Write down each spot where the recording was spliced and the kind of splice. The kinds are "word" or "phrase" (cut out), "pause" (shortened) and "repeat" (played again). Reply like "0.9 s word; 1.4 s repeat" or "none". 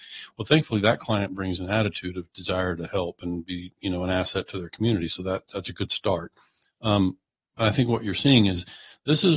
none